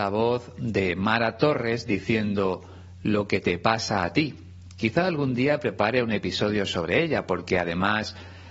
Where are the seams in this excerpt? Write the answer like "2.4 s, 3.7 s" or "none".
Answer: none